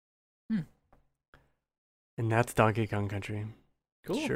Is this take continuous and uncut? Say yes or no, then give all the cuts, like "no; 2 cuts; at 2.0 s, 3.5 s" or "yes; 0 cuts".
yes; 0 cuts